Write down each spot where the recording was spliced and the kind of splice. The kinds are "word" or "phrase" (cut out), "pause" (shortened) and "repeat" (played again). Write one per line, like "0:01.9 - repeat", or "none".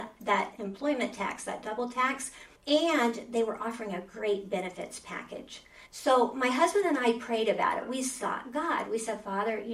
0:02.6 - pause
0:05.9 - pause